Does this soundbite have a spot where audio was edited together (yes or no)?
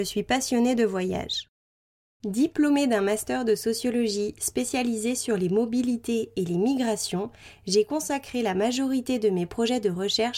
no